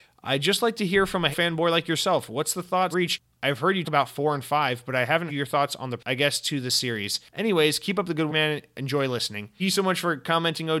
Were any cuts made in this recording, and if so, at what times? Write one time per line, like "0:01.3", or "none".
0:01.3
0:02.9
0:03.8
0:05.3
0:06.0
0:08.3
0:09.6